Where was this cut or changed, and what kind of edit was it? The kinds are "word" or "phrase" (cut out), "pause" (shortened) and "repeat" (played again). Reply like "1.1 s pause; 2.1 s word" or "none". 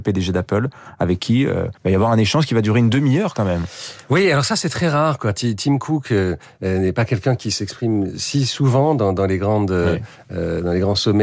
1.8 s pause